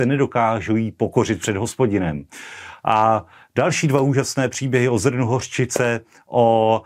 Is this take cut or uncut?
uncut